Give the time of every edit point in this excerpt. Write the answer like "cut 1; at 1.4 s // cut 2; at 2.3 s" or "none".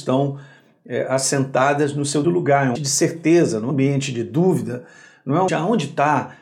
cut 1; at 2.2 s // cut 2; at 2.8 s // cut 3; at 3.7 s // cut 4; at 5.5 s